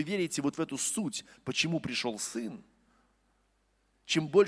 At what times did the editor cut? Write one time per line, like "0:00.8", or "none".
none